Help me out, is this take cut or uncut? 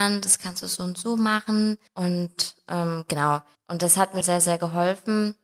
cut